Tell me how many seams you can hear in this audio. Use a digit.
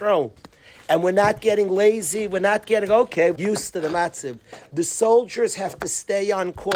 1